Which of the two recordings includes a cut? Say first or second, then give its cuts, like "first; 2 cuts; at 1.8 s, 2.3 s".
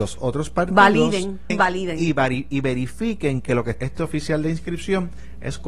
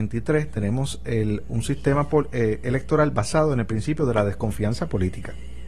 first; 2 cuts; at 1.5 s, 3.8 s